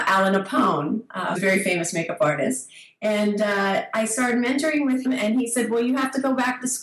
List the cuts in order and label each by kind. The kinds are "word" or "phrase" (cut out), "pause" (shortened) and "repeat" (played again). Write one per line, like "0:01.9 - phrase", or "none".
0:01.3 - word
0:05.0 - word

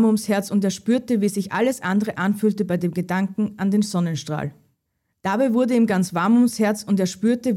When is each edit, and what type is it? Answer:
none

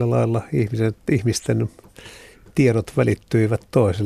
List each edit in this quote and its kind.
none

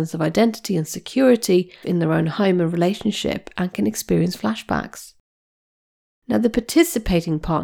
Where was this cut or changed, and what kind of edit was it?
0:01.8 - phrase

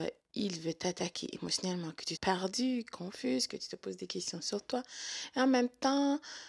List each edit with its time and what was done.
0:02.1 - word

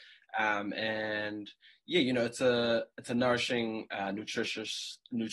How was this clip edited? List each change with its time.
none

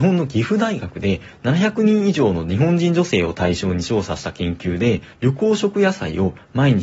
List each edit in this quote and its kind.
0:05.1 - pause

